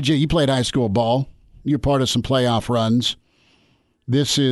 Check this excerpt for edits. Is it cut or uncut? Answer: uncut